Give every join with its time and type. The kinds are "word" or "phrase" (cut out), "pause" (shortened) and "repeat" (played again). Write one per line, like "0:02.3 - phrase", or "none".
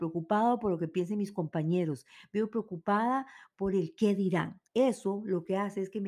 0:04.7 - pause